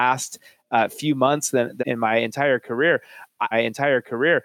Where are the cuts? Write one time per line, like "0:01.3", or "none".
0:01.8
0:03.5